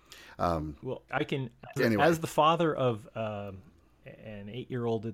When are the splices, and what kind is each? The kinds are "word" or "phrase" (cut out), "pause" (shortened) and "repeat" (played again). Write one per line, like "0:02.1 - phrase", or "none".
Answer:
0:01.1 - word
0:01.8 - word